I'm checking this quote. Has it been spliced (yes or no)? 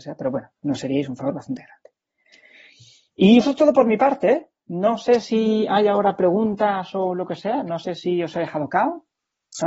yes